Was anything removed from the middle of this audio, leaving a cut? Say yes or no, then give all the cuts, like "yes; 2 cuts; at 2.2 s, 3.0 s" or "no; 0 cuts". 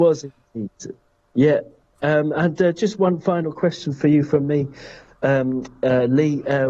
no; 0 cuts